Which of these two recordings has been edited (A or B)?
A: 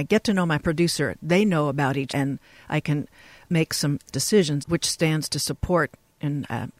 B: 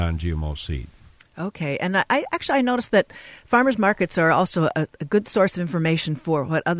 A